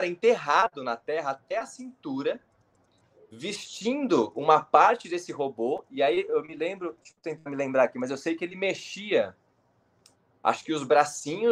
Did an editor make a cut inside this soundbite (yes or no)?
no